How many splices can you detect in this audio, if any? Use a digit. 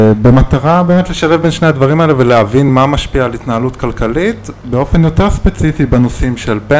0